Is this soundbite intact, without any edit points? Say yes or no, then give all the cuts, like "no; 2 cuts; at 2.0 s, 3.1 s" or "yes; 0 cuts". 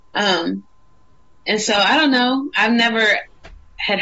yes; 0 cuts